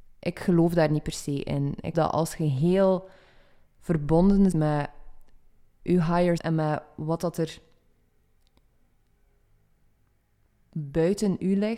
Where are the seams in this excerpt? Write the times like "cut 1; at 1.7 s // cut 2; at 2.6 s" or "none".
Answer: cut 1; at 1.9 s // cut 2; at 4.5 s // cut 3; at 6.4 s